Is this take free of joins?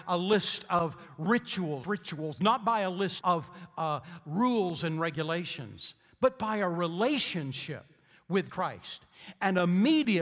no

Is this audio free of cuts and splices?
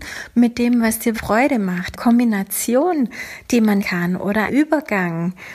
no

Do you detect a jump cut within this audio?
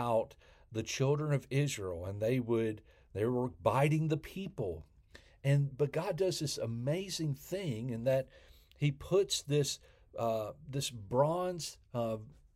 no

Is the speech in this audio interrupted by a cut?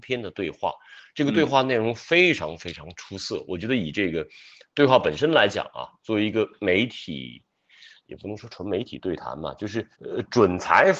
yes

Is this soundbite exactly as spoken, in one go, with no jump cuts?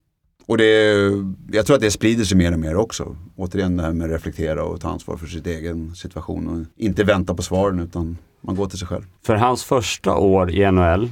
no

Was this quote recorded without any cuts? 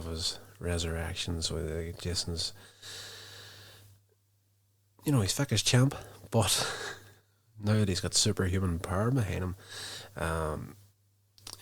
yes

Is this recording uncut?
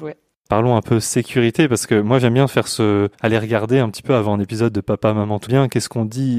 no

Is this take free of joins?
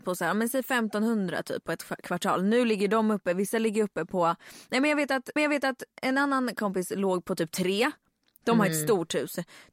no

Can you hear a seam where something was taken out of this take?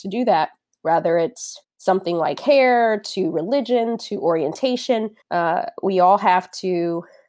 yes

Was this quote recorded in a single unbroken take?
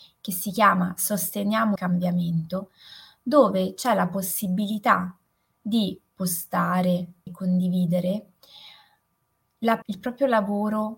no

